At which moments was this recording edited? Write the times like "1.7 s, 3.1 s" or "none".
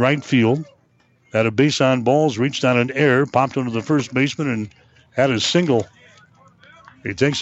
none